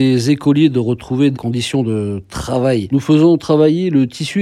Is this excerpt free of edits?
no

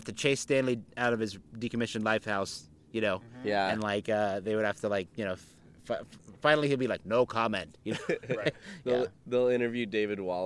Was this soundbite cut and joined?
no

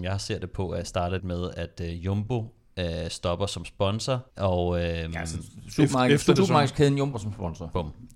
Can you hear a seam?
yes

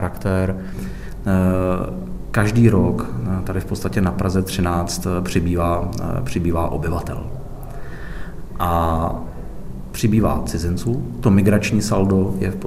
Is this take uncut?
yes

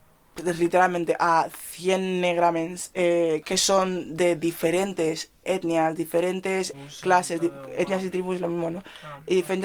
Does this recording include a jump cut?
yes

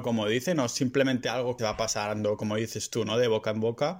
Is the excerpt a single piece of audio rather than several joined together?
no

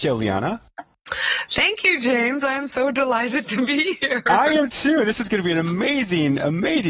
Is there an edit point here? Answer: no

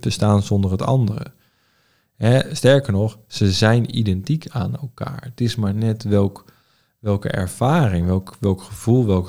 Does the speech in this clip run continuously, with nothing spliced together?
yes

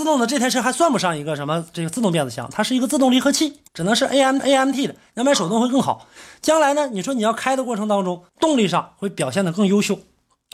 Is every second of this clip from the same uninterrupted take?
no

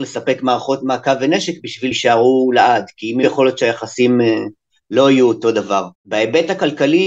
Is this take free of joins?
no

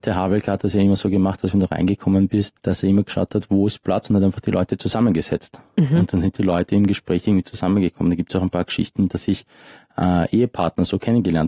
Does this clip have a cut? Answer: no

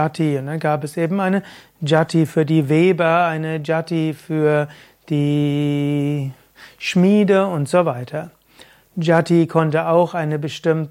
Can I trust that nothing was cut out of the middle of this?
yes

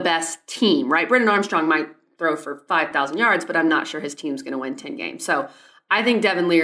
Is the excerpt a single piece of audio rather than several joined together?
yes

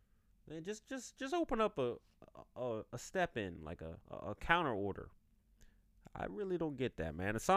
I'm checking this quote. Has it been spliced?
yes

